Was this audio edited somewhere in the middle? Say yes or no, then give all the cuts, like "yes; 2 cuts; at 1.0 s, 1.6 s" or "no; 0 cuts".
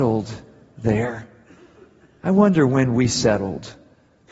no; 0 cuts